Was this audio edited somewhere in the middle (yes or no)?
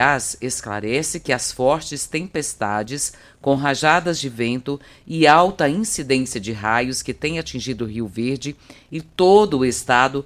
no